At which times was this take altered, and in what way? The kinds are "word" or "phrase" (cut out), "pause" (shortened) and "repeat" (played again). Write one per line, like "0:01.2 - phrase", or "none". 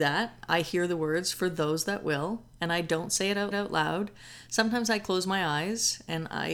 0:03.5 - repeat